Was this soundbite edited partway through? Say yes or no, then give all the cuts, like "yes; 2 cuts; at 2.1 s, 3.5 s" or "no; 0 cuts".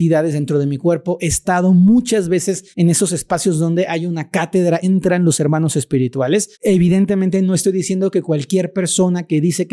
yes; 3 cuts; at 2.7 s, 4.8 s, 6.5 s